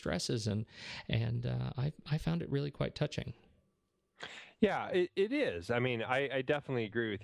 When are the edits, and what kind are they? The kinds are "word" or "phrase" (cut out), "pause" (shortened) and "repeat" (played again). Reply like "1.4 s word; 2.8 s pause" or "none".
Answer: none